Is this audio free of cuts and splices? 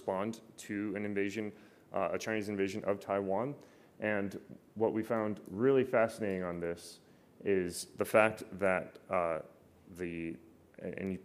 yes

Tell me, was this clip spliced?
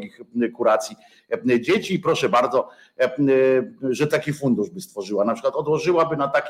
yes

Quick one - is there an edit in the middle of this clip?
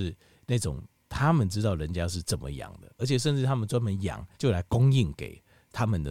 yes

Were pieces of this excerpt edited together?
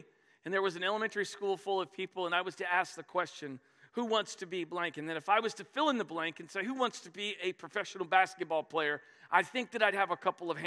no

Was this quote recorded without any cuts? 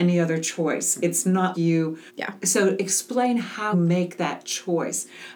no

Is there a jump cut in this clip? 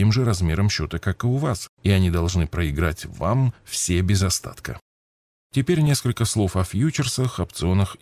no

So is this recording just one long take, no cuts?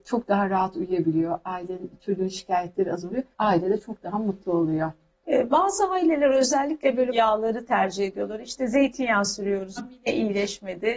no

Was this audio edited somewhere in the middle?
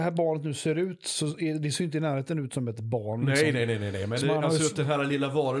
no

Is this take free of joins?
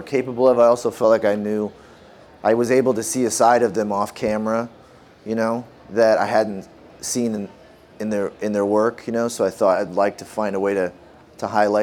yes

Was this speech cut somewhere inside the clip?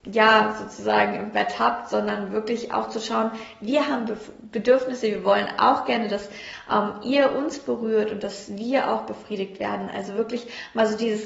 no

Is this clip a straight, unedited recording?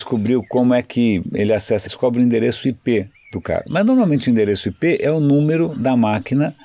no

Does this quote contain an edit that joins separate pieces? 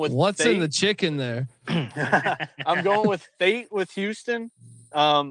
no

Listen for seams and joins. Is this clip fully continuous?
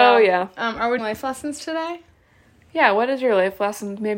no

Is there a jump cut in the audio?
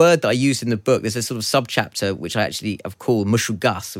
no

